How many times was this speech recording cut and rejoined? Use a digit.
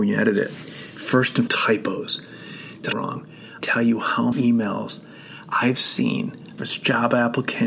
5